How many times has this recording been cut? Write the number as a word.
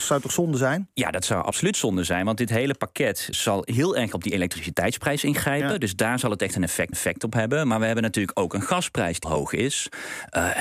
three